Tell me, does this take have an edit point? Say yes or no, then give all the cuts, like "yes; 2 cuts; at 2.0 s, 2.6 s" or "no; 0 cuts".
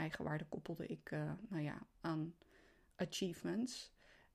no; 0 cuts